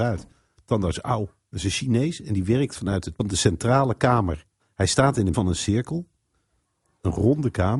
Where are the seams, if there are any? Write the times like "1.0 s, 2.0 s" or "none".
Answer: 3.2 s, 4.6 s, 5.3 s